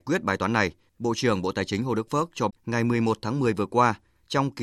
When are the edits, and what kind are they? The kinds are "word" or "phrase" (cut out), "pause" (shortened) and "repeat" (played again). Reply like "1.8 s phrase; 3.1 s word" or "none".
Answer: 2.5 s word